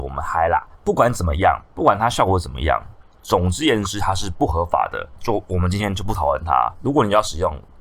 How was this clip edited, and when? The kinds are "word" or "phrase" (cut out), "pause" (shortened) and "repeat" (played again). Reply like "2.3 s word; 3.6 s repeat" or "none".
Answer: none